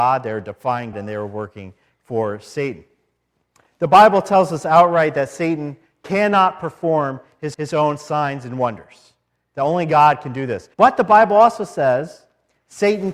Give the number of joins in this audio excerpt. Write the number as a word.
three